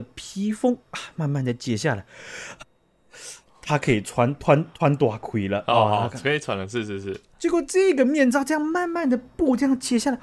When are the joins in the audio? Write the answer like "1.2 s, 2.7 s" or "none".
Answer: none